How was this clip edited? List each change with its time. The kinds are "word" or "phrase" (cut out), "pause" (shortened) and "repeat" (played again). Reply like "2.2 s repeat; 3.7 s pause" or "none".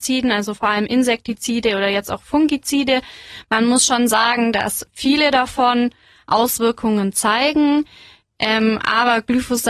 none